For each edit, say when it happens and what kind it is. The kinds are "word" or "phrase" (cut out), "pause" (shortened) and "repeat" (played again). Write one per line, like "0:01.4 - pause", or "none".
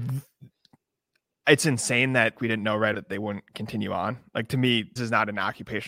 0:02.3 - word
0:02.9 - word
0:05.0 - word